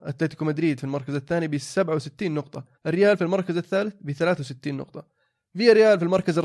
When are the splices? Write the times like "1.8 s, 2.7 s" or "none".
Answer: 2.7 s